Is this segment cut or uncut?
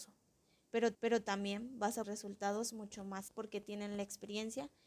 cut